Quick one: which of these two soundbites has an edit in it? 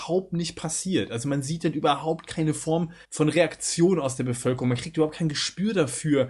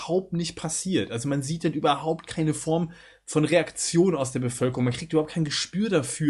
first; 1 cut; at 3.0 s

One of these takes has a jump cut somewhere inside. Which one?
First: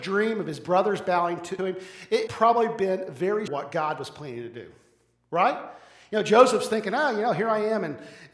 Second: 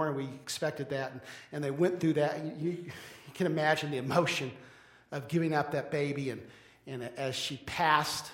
first; 3 cuts; at 1.6 s, 2.3 s, 3.5 s

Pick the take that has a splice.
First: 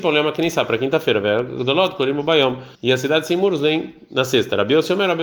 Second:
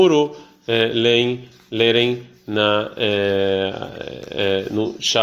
first; 1 cut; at 2.7 s

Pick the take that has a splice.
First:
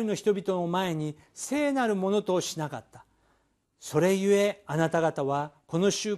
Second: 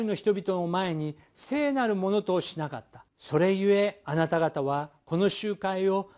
second; 1 cut; at 3.1 s

